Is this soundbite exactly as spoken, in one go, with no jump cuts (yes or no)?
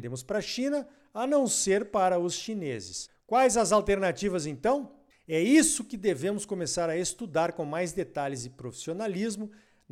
yes